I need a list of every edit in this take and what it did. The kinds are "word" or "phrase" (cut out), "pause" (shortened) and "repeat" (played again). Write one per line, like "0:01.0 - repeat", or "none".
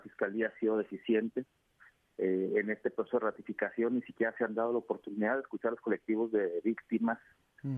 none

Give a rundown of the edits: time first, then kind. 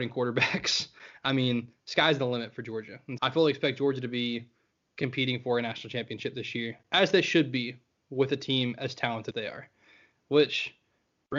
0:03.2 - word
0:09.3 - word

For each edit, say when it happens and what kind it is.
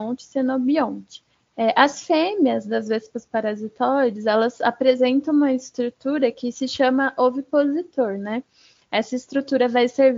none

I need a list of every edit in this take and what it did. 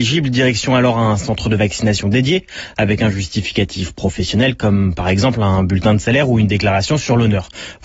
none

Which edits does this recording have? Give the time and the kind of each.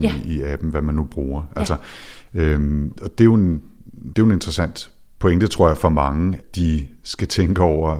0:02.9 - word
0:04.1 - word
0:06.4 - word

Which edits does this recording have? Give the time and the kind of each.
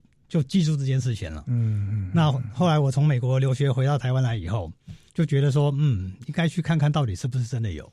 0:05.1 - pause

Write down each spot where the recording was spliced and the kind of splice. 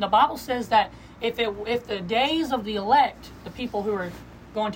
none

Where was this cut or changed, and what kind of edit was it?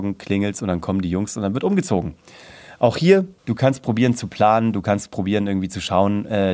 0:03.4 - pause

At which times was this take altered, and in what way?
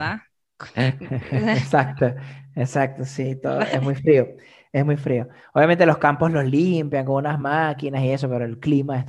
none

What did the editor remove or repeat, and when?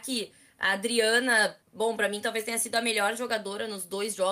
0:01.6 - pause

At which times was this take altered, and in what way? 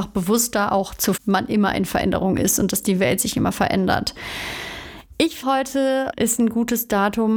0:01.2 - phrase
0:05.4 - word
0:06.1 - word

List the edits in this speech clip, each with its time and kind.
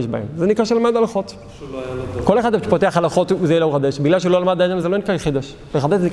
none

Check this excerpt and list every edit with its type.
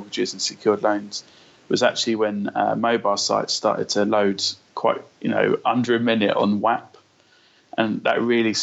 none

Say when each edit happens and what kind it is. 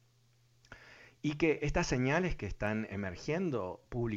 none

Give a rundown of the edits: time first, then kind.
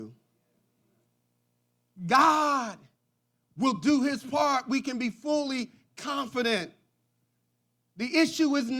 none

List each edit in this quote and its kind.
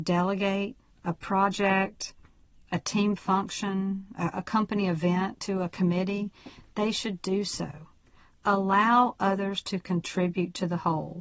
none

